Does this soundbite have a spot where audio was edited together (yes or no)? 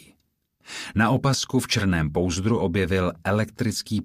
no